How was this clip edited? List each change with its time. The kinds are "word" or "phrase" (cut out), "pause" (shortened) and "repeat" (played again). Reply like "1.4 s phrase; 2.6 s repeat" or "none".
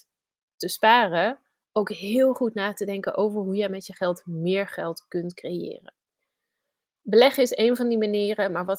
none

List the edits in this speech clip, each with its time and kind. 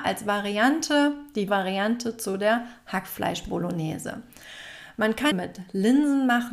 1.5 s word; 5.3 s phrase

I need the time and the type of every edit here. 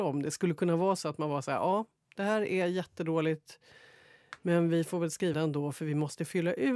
5.3 s word

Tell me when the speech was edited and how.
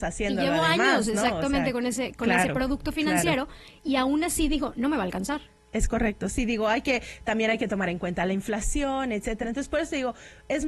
none

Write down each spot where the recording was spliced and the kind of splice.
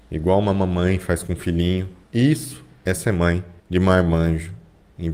2.0 s pause; 3.6 s pause

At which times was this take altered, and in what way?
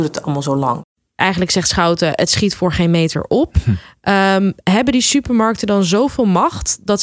none

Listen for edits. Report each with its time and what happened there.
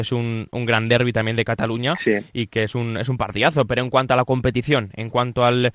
none

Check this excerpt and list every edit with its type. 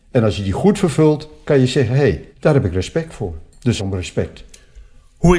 2.3 s pause; 3.8 s phrase

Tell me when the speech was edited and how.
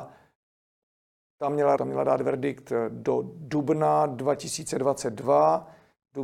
1.8 s word

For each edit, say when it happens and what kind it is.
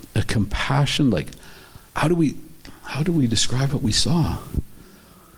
1.9 s pause

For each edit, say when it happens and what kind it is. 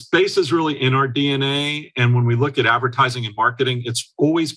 none

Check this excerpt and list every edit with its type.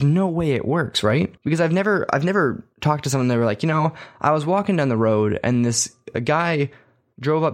1.4 s pause; 2.7 s pause

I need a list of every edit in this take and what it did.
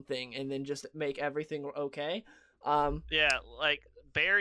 none

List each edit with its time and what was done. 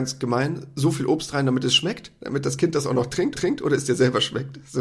3.3 s repeat

